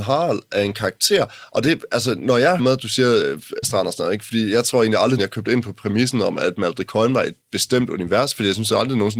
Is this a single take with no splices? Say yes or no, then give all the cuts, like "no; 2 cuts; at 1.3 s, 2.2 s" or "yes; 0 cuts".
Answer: no; 4 cuts; at 2.6 s, 3.6 s, 5.2 s, 7.4 s